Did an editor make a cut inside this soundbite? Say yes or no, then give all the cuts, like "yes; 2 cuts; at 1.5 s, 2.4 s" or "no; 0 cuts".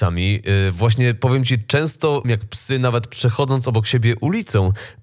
yes; 1 cut; at 2.2 s